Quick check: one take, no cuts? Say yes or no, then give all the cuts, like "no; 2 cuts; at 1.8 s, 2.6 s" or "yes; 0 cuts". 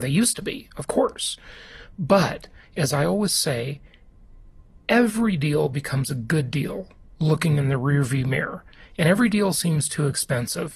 yes; 0 cuts